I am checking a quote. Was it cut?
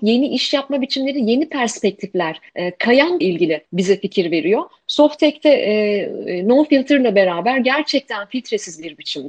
yes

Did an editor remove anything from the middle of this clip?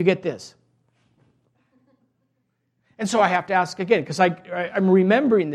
no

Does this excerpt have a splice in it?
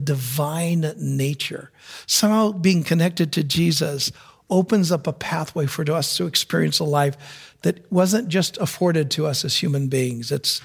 no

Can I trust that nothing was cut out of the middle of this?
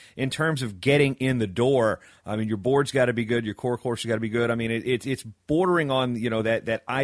yes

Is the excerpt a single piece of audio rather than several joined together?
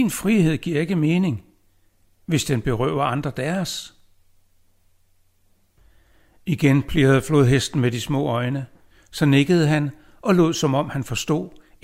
yes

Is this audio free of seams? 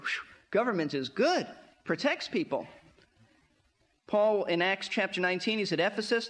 yes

